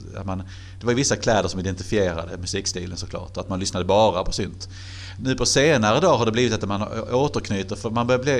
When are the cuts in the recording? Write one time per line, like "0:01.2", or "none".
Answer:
none